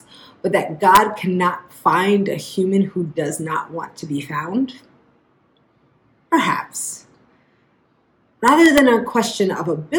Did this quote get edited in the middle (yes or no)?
no